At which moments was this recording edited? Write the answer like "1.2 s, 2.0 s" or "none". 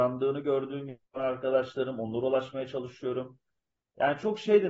1.0 s